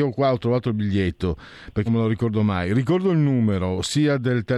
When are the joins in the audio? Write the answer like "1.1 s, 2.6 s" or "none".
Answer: 1.9 s

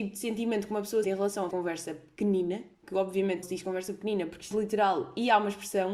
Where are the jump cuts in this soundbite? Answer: 1.0 s, 1.5 s, 3.4 s, 4.5 s

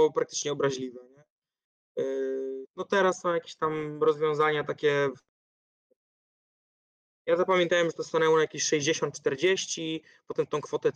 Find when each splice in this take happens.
none

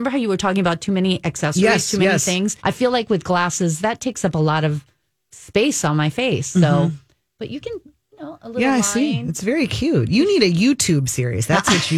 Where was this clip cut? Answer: 2.6 s

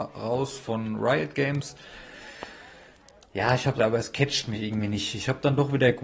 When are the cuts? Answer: 3.8 s

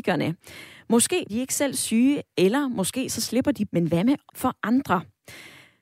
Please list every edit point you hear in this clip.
1.3 s, 3.7 s, 4.3 s

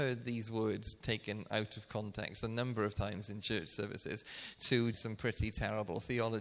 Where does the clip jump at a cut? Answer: 4.9 s

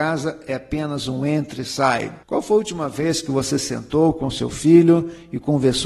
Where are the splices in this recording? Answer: 2.2 s

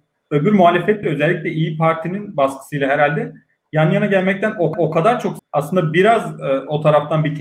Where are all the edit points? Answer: 1.0 s, 4.7 s, 5.4 s

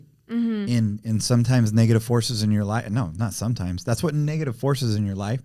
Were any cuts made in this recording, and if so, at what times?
none

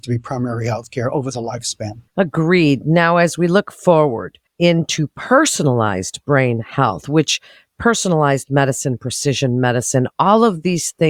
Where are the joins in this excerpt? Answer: 2.1 s, 4.5 s

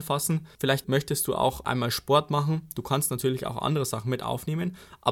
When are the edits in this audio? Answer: none

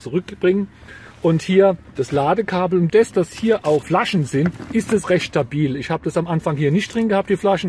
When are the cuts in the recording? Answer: 2.0 s, 2.9 s, 3.8 s, 5.0 s

